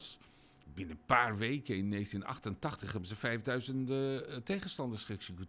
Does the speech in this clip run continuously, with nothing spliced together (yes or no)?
yes